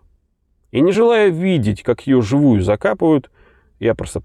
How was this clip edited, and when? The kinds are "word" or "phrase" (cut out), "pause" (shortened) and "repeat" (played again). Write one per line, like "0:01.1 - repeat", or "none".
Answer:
none